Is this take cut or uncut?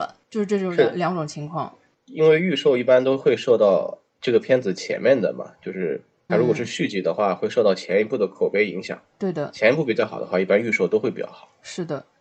cut